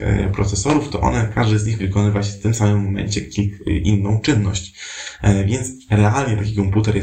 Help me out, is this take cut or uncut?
cut